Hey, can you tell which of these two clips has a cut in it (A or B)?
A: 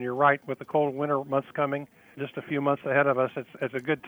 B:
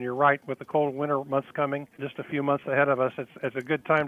B